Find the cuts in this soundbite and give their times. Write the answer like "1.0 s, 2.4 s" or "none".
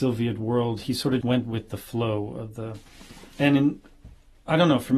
1.2 s